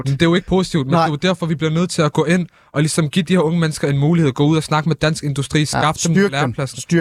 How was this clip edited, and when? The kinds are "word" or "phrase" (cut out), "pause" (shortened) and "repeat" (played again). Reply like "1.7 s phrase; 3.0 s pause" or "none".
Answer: none